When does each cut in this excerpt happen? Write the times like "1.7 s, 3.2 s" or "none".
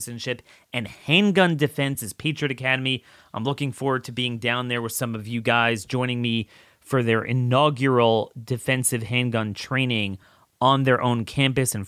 none